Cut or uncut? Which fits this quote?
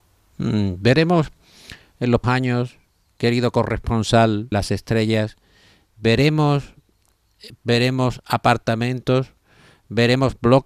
cut